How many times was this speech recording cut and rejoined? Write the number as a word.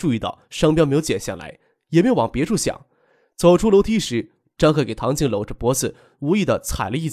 zero